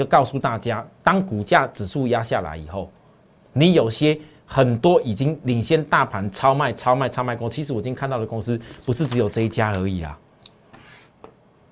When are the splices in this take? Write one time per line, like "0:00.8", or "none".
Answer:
none